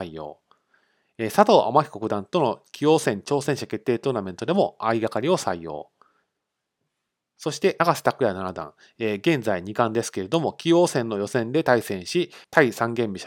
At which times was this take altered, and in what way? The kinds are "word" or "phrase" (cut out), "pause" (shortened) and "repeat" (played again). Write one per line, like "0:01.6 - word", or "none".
none